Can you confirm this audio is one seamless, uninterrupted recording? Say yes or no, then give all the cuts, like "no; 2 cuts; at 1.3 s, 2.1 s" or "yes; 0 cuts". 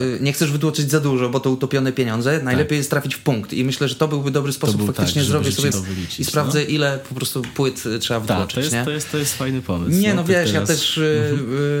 no; 1 cut; at 5.7 s